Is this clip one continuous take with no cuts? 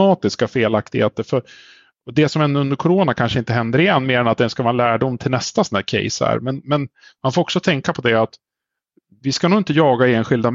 yes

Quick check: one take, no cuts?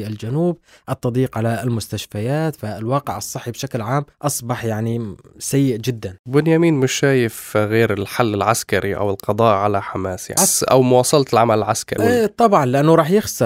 no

